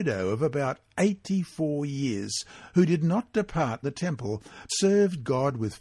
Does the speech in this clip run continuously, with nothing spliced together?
no; 2 cuts; at 3.8 s, 4.7 s

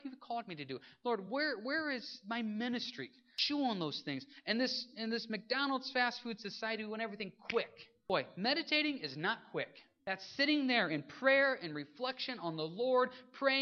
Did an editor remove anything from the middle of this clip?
no; 0 cuts

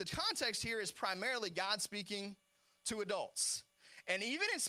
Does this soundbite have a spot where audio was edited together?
no; 0 cuts

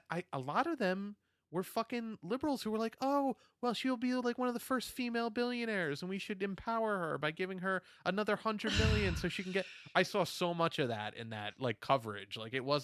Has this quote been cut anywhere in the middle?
no; 0 cuts

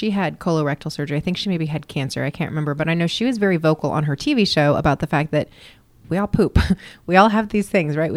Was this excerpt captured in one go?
yes; 0 cuts

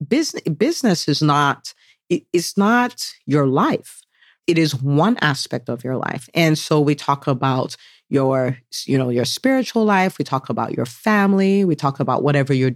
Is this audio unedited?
yes; 0 cuts

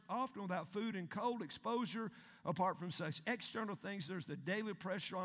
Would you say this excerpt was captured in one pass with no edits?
yes; 0 cuts

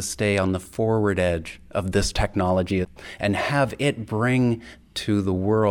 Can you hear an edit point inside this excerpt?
no; 0 cuts

